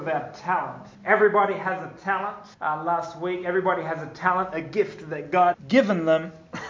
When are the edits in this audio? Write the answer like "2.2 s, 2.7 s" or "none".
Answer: 0.9 s, 2.5 s, 5.5 s